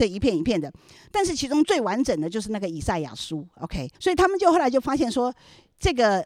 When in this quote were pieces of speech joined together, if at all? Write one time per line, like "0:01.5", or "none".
0:03.9